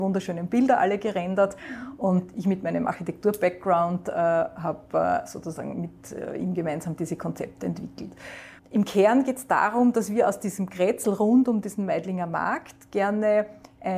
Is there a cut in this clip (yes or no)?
yes